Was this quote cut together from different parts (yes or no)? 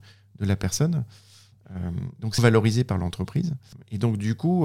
yes